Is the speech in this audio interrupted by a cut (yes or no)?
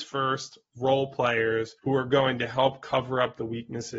yes